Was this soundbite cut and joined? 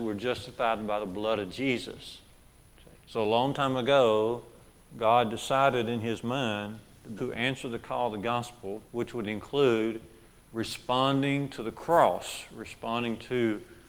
yes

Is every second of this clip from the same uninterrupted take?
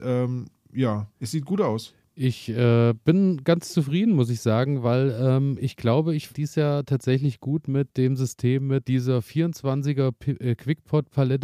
no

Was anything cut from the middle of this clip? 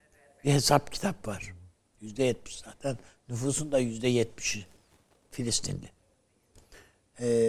no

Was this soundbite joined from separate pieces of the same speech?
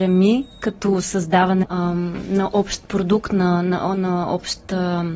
yes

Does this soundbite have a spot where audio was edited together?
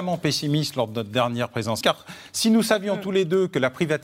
yes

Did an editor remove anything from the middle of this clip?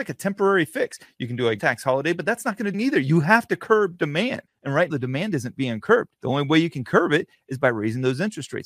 yes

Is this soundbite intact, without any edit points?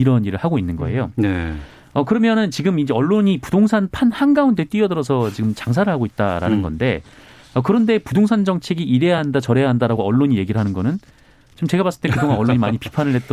yes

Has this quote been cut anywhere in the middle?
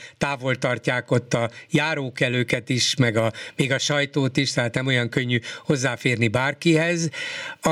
no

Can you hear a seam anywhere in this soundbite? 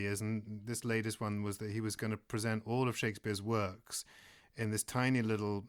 no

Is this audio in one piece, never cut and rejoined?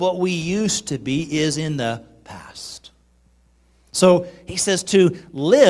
yes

